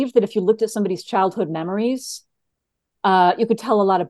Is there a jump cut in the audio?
no; 0 cuts

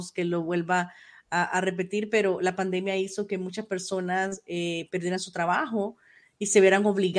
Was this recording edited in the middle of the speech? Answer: no; 0 cuts

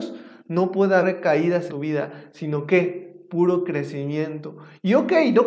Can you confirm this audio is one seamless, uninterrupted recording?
no; 2 cuts; at 1.0 s, 1.7 s

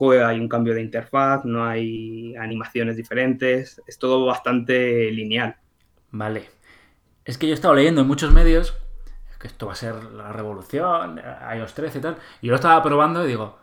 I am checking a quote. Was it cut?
no; 0 cuts

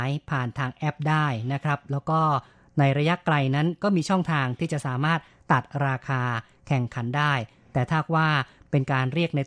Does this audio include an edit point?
no; 0 cuts

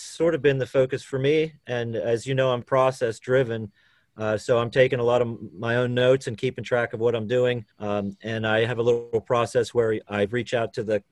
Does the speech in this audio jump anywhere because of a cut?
yes; 2 cuts; at 2.6 s, 7.7 s

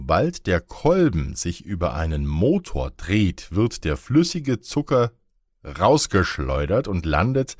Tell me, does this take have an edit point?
no; 0 cuts

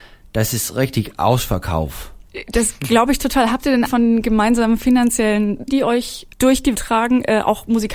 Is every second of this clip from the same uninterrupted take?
no; 3 cuts; at 3.9 s, 5.7 s, 6.7 s

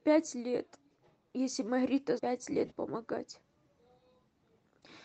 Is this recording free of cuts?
no; 2 cuts; at 2.2 s, 2.7 s

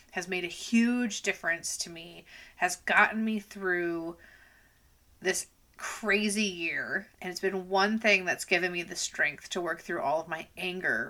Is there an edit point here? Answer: yes; 1 cut; at 7.1 s

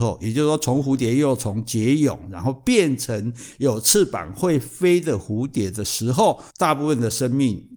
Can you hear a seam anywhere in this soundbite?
yes; 1 cut; at 6.5 s

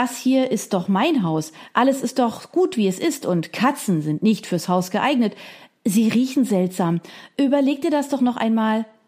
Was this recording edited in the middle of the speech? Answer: no; 0 cuts

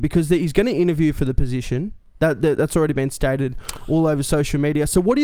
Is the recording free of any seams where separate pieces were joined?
yes; 0 cuts

